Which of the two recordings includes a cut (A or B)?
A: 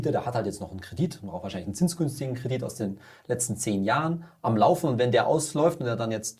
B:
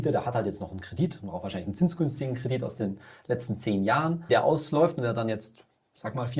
B